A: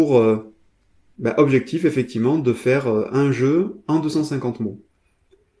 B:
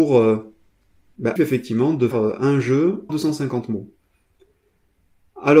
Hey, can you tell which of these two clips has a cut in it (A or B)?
B